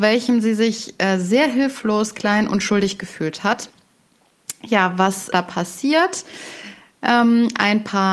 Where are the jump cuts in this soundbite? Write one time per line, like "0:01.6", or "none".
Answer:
0:05.3

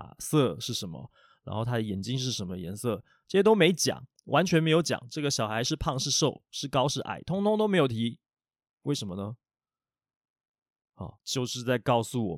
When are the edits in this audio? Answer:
0:08.6
0:11.2

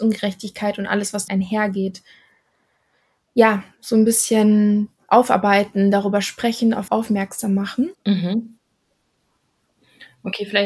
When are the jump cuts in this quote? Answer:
0:01.3
0:06.9
0:07.9

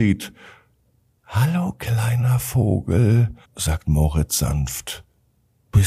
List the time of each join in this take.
0:03.4

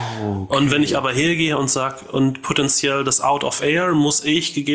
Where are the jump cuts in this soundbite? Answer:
none

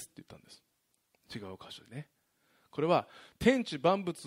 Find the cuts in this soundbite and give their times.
none

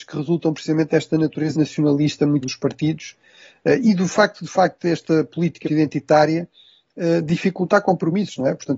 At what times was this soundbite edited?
0:01.5
0:02.4
0:03.8
0:05.6

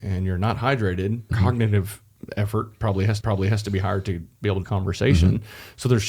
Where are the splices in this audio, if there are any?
0:01.3
0:03.2
0:04.6

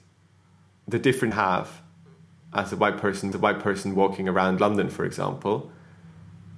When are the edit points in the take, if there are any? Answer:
0:01.3
0:03.3

